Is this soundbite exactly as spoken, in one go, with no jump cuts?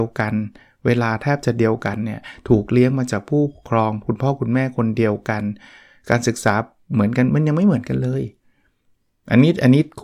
yes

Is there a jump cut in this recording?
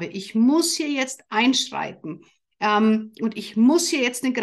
no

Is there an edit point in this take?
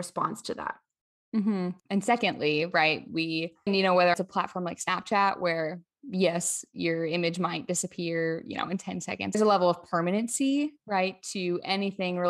yes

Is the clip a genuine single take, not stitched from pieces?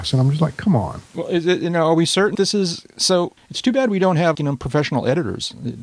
no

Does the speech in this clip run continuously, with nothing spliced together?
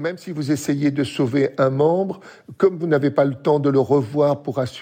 yes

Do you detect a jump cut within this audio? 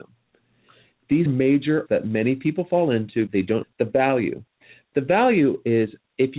yes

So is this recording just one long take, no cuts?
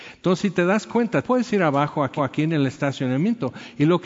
no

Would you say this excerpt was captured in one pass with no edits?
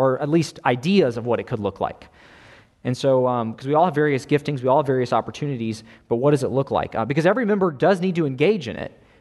yes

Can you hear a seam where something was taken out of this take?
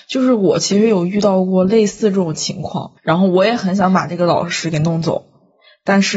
yes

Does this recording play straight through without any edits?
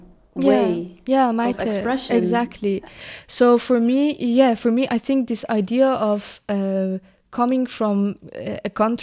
yes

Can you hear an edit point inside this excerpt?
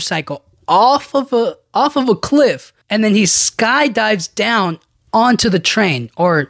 yes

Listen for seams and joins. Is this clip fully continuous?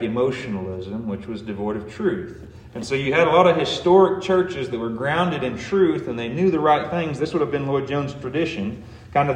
yes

